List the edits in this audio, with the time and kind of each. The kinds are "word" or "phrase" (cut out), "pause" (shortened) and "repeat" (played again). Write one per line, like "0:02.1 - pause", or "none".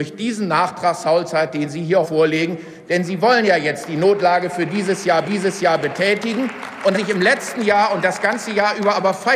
0:02.0 - word
0:05.2 - repeat
0:06.9 - word